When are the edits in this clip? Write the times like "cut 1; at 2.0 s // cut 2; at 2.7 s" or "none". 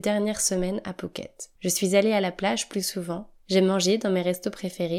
cut 1; at 1.6 s // cut 2; at 3.4 s

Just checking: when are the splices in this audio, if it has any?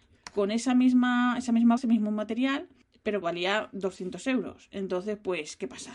cut 1; at 1.8 s // cut 2; at 3.2 s

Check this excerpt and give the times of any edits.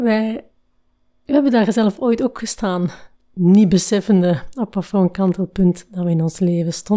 none

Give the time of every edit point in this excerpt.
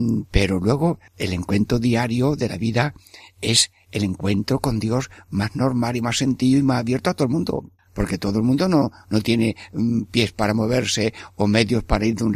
cut 1; at 1.1 s // cut 2; at 7.8 s

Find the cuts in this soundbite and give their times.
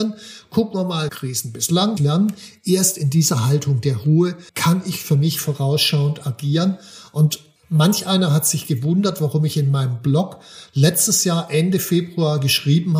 cut 1; at 1.1 s // cut 2; at 2.0 s // cut 3; at 4.5 s

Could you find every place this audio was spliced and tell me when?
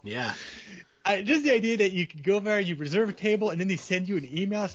none

